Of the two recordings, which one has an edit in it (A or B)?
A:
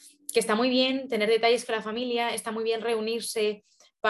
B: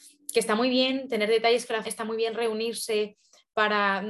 B